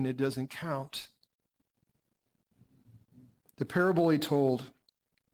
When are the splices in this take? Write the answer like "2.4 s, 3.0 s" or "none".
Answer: none